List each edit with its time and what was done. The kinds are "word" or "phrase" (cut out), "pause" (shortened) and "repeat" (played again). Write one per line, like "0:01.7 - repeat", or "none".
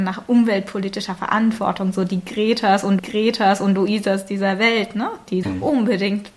0:03.0 - repeat
0:05.4 - word